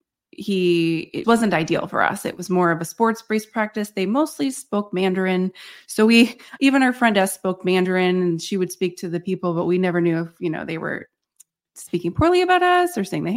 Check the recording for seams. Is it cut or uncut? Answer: cut